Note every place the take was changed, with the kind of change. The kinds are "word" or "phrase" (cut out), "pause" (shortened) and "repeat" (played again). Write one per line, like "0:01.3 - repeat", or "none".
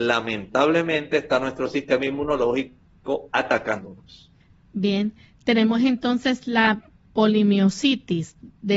none

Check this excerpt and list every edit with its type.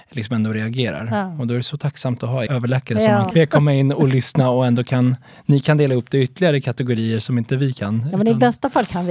0:02.5 - word
0:03.3 - word

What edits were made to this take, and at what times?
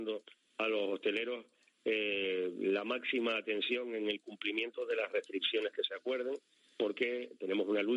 none

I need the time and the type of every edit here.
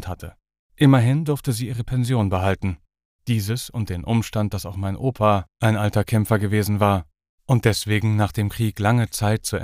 none

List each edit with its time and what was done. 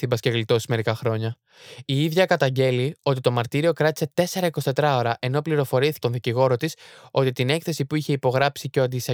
0:06.0 - word

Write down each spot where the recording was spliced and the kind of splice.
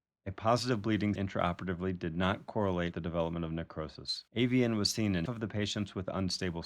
0:01.2 - word
0:02.9 - word
0:04.3 - pause
0:05.3 - word

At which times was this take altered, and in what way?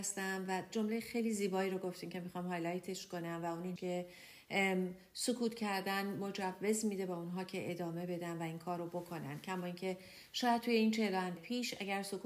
0:03.8 - word
0:11.4 - word

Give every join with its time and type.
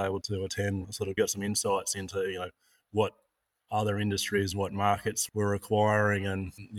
0:01.2 - word

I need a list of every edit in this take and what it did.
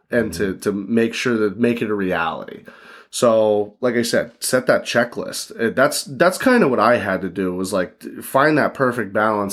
none

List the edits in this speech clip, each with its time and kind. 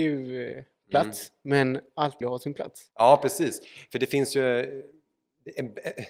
0:02.2 - word
0:02.9 - pause

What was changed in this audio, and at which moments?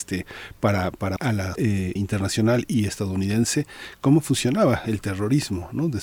0:01.2 - word
0:01.6 - word
0:02.0 - word

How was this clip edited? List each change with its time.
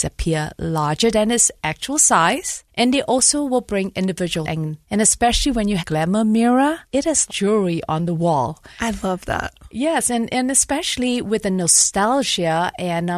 0:02.7 - pause
0:04.4 - word
0:04.8 - pause
0:05.8 - phrase
0:06.8 - pause
0:07.3 - word

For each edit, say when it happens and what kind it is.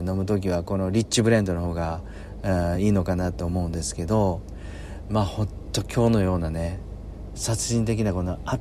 none

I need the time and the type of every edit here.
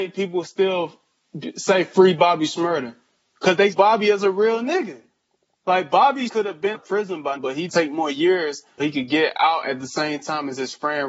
0:03.7 - word
0:06.3 - word
0:06.7 - word
0:07.4 - word
0:07.7 - word
0:08.8 - word

